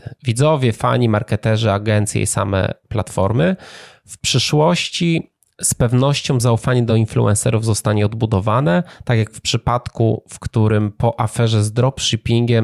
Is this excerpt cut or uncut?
uncut